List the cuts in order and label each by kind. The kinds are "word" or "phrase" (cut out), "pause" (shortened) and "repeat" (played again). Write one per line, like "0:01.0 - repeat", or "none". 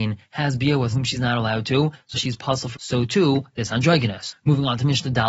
0:00.9 - word
0:02.1 - word
0:02.7 - phrase